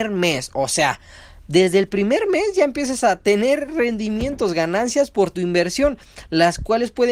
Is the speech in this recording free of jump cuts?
yes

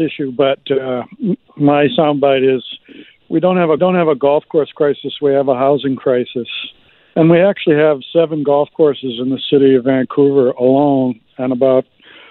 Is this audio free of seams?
no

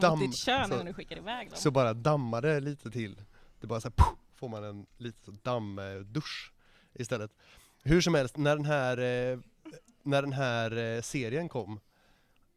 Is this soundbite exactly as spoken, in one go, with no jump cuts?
yes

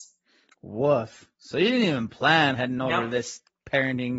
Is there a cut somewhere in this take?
yes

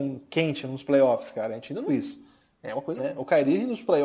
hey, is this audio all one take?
no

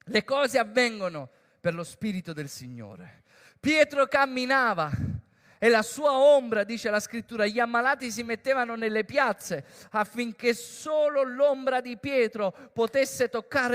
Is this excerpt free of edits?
yes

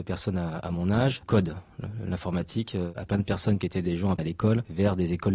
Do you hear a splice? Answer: yes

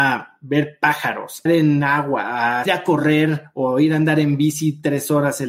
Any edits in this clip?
yes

